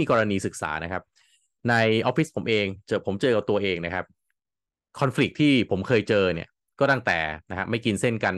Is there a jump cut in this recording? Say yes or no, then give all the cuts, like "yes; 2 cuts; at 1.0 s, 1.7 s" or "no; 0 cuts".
no; 0 cuts